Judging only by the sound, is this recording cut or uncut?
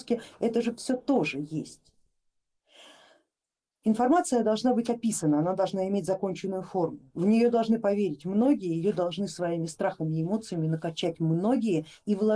uncut